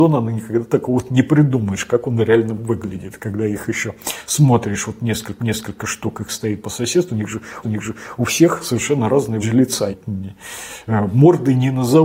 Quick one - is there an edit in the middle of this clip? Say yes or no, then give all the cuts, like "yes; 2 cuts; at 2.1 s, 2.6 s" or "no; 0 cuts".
yes; 4 cuts; at 5.4 s, 7.6 s, 9.4 s, 9.9 s